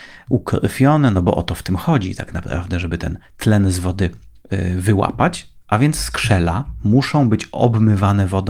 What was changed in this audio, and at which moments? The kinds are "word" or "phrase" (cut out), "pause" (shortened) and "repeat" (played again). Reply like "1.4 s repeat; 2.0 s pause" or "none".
none